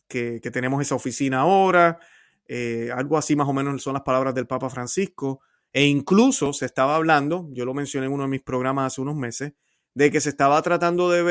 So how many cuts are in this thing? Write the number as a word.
zero